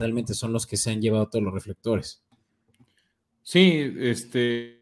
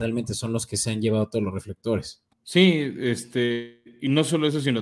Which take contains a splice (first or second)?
second